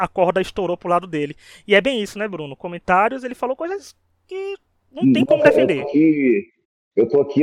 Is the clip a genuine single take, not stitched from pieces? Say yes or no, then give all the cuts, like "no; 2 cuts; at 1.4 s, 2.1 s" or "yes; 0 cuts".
yes; 0 cuts